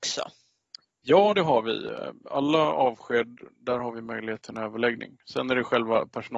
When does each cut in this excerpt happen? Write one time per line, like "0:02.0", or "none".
none